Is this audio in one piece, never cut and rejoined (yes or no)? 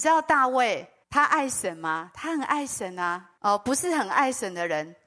no